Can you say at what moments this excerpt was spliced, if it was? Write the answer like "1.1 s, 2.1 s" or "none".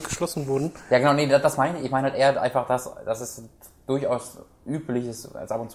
none